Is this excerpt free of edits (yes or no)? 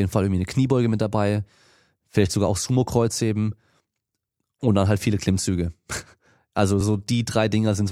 yes